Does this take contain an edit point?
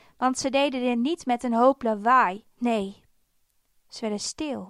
yes; 1 cut; at 2.5 s

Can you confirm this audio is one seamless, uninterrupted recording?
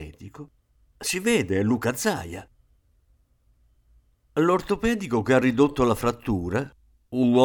yes; 0 cuts

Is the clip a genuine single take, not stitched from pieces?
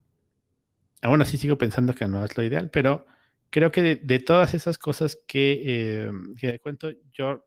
yes; 0 cuts

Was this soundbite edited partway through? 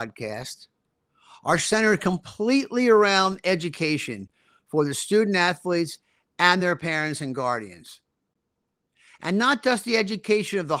no; 0 cuts

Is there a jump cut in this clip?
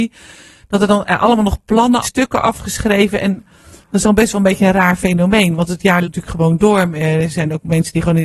yes; 3 cuts; at 2.0 s, 4.0 s, 6.0 s

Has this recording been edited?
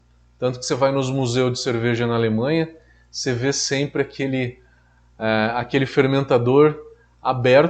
no; 0 cuts

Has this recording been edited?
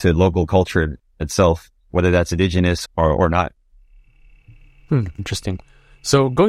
yes; 4 cuts; at 1.0 s, 1.8 s, 2.8 s, 5.2 s

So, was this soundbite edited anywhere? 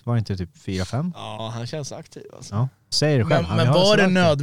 yes; 1 cut; at 2.9 s

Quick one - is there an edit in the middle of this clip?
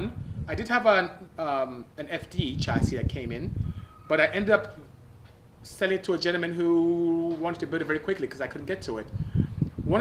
no; 0 cuts

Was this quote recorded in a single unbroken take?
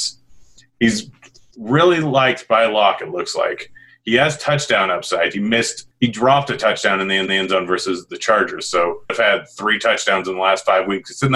no; 3 cuts; at 5.9 s, 7.3 s, 9.1 s

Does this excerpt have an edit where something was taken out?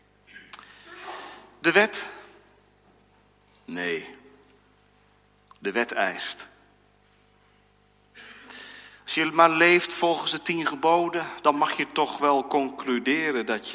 no; 0 cuts

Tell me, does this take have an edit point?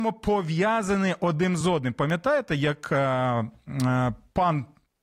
no; 0 cuts

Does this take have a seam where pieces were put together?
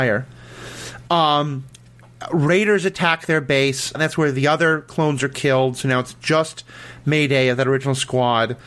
yes; 1 cut; at 3.9 s

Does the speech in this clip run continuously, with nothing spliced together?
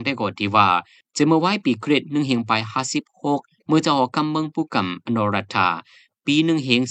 yes; 0 cuts

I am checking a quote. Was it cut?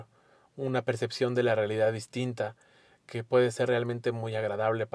no; 0 cuts

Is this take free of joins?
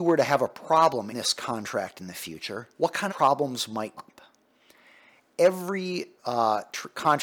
no; 5 cuts; at 1.1 s, 2.7 s, 3.1 s, 4.0 s, 6.2 s

